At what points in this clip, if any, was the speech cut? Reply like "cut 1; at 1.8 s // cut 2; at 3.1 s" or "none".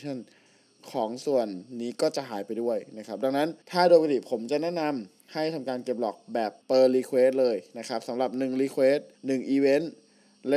cut 1; at 3.6 s // cut 2; at 6.6 s // cut 3; at 9.1 s